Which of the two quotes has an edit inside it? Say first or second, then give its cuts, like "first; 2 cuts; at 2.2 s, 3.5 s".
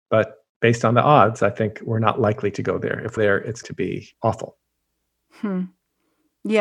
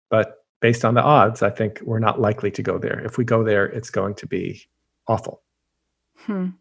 first; 3 cuts; at 3.2 s, 3.6 s, 4.1 s